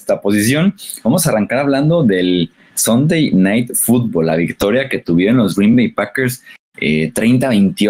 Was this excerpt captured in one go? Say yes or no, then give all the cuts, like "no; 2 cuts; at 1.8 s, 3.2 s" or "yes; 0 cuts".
yes; 0 cuts